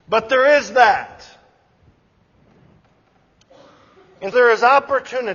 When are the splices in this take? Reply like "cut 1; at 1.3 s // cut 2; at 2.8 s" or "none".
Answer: cut 1; at 4.3 s

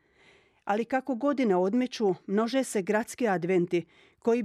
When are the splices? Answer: none

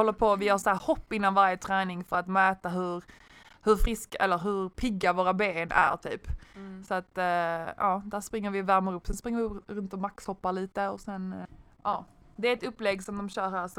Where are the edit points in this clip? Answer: none

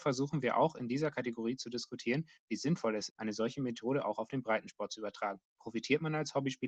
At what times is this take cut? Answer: cut 1; at 3.1 s

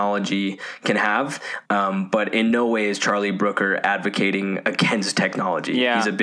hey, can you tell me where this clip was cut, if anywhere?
none

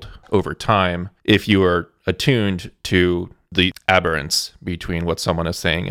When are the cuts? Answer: cut 1; at 1.2 s

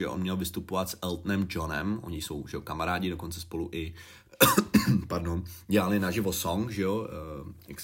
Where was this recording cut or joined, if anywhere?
none

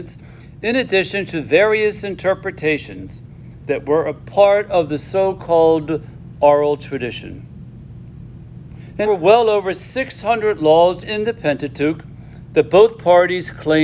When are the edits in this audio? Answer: cut 1; at 9.0 s // cut 2; at 11.0 s

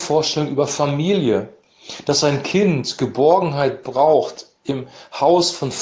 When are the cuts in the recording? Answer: none

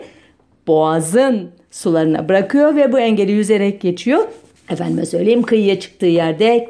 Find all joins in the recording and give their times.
cut 1; at 4.6 s

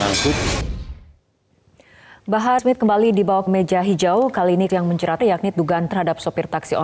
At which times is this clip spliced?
cut 1; at 2.6 s // cut 2; at 3.5 s // cut 3; at 4.7 s // cut 4; at 5.2 s // cut 5; at 5.5 s // cut 6; at 5.9 s

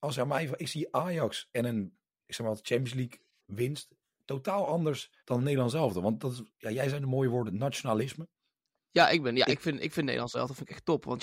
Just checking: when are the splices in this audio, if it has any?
cut 1; at 5.2 s

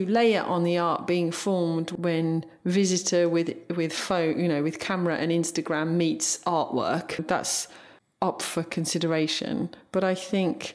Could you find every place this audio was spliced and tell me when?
none

